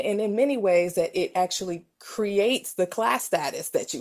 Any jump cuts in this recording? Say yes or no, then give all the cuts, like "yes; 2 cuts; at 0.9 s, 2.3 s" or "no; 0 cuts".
no; 0 cuts